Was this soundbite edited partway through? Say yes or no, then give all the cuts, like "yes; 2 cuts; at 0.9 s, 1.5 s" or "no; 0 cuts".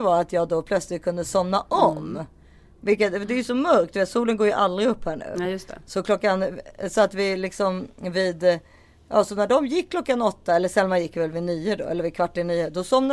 no; 0 cuts